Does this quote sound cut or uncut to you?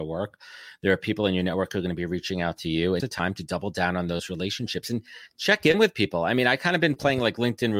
cut